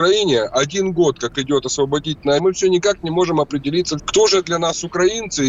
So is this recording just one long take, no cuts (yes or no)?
no